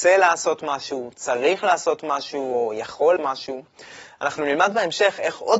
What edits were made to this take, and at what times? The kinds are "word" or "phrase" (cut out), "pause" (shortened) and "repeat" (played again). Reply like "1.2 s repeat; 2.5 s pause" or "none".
3.2 s word